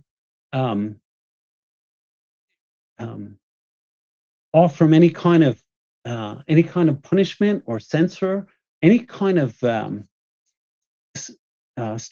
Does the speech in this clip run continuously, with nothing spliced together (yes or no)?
yes